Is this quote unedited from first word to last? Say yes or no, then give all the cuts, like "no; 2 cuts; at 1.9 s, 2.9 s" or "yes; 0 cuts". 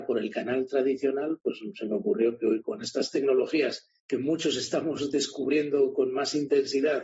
no; 1 cut; at 4.0 s